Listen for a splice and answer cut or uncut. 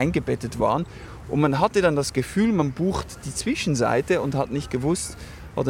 uncut